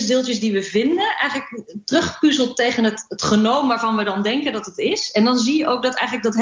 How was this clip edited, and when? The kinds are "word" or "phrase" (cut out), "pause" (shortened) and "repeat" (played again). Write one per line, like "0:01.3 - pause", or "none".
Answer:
none